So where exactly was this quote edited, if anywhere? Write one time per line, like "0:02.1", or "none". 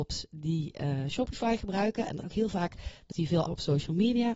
0:02.2
0:03.1
0:03.5